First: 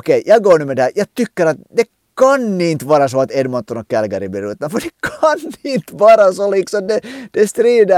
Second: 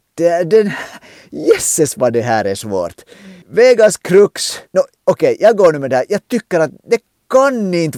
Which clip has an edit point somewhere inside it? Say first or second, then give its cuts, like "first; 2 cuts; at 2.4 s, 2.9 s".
second; 2 cuts; at 3.4 s, 4.7 s